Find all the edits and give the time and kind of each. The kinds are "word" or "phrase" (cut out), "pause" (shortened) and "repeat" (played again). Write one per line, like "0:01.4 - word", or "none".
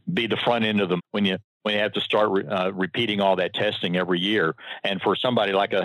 0:01.0 - phrase